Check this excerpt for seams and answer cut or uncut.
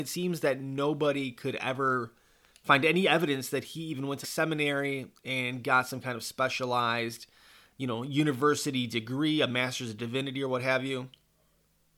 cut